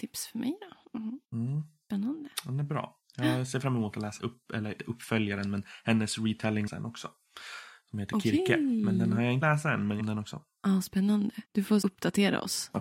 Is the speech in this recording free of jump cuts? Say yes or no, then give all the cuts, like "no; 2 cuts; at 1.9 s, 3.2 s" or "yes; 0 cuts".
no; 8 cuts; at 1.2 s, 4.2 s, 4.8 s, 6.7 s, 9.4 s, 10.0 s, 11.4 s, 11.8 s